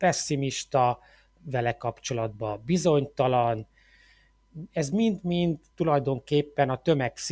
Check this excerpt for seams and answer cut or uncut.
uncut